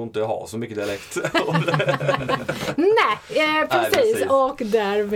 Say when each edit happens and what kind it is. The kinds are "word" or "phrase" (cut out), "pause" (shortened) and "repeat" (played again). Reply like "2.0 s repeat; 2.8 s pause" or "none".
none